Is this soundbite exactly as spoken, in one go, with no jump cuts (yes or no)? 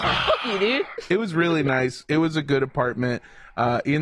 yes